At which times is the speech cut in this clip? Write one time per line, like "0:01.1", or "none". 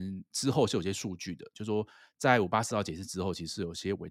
none

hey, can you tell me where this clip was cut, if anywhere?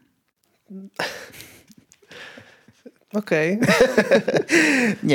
0:03.0

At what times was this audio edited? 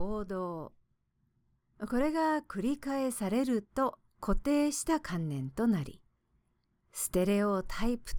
0:04.1

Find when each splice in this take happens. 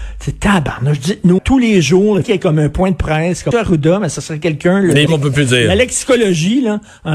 0:01.4
0:02.2
0:03.5
0:05.1

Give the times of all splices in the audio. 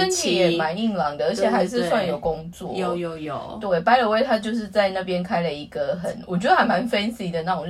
none

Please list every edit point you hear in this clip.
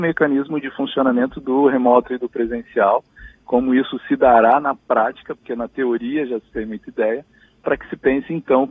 none

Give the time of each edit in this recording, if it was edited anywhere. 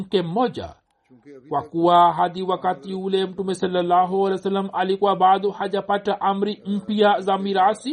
none

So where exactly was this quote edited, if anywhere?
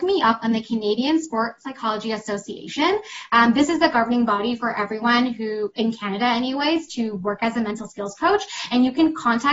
none

